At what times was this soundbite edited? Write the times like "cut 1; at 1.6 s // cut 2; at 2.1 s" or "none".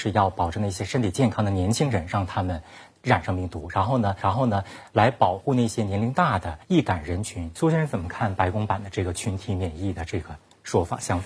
cut 1; at 4.2 s // cut 2; at 6.6 s